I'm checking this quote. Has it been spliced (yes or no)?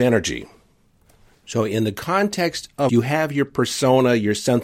yes